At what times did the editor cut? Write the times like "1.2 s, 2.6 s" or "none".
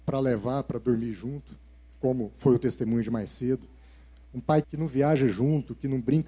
4.6 s